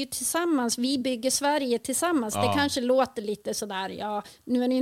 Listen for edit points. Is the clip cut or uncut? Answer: uncut